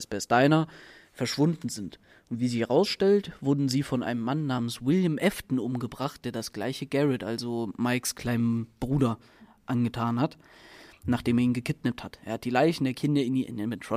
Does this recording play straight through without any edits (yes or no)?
yes